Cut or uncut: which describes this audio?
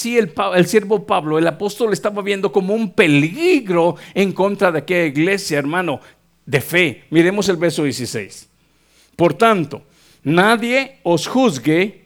uncut